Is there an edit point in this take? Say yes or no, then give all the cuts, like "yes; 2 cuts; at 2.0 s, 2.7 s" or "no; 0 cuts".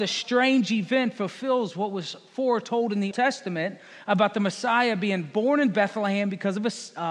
yes; 1 cut; at 3.1 s